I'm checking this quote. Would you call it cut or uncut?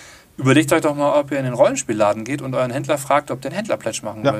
cut